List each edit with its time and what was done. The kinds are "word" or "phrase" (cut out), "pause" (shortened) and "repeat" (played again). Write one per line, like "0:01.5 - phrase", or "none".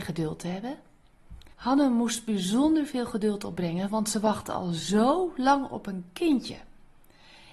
0:01.5 - pause